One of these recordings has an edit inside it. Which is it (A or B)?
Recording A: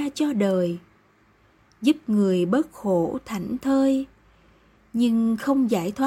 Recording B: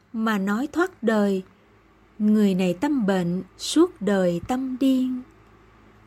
B